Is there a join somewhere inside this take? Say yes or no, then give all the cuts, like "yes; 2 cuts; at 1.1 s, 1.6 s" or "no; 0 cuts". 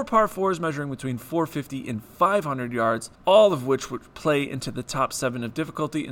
yes; 1 cut; at 3.1 s